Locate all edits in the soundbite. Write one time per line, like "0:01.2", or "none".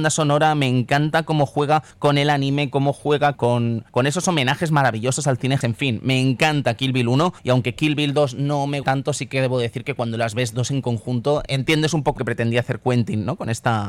0:01.9
0:03.3
0:03.9
0:05.6
0:07.4
0:08.8
0:11.5
0:12.2